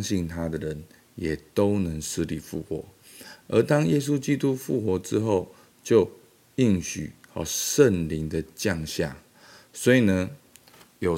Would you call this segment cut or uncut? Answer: uncut